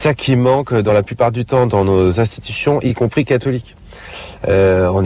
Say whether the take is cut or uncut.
uncut